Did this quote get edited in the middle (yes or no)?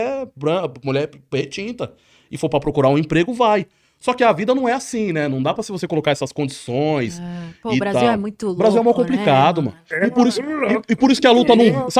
yes